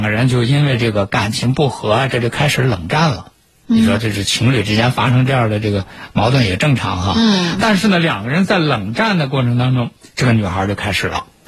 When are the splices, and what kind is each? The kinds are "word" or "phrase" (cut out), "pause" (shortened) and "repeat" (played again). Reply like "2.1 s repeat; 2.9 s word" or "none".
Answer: none